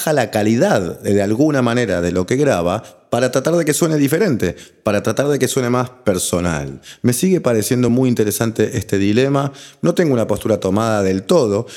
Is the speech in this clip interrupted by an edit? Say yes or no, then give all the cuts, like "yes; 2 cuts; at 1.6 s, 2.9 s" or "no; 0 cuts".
no; 0 cuts